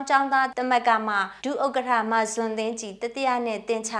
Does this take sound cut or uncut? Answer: cut